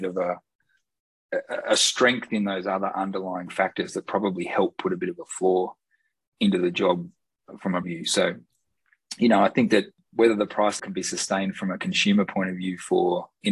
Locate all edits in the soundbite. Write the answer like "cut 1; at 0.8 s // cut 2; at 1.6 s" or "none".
cut 1; at 7.8 s // cut 2; at 10.8 s